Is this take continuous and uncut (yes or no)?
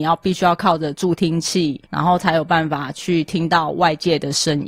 no